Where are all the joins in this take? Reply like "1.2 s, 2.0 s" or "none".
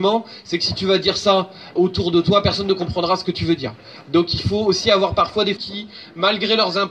1.8 s, 5.6 s